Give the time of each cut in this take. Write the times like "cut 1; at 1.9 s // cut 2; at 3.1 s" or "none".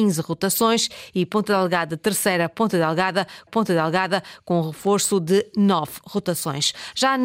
cut 1; at 3.5 s